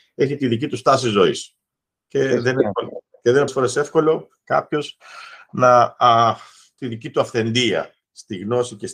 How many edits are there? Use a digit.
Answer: 2